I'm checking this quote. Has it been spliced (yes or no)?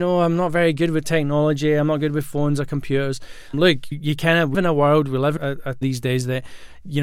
yes